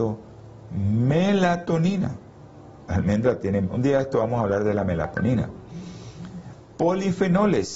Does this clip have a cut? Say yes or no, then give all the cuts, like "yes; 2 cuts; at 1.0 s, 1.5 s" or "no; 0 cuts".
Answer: no; 0 cuts